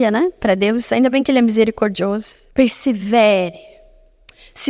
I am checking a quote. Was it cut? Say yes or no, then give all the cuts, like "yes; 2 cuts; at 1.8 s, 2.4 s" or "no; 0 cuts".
yes; 1 cut; at 2.5 s